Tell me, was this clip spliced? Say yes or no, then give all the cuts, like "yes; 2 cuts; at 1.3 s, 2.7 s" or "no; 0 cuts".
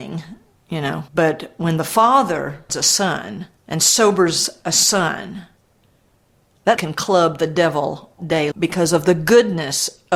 yes; 6 cuts; at 1.1 s, 2.7 s, 3.6 s, 6.8 s, 8.2 s, 8.5 s